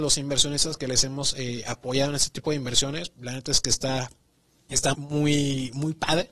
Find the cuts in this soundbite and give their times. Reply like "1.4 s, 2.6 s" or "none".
4.9 s